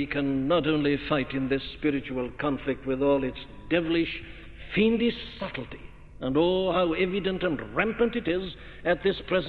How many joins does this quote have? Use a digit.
0